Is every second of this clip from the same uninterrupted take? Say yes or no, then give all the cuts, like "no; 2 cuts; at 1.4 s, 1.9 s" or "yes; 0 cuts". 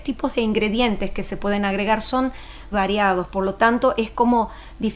no; 1 cut; at 2.7 s